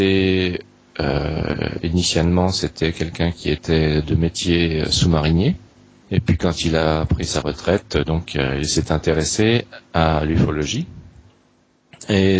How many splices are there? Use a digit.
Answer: 0